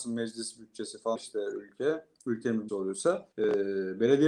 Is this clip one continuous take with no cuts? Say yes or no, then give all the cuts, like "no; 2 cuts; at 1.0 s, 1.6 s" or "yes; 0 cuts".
no; 3 cuts; at 1.2 s, 2.7 s, 3.3 s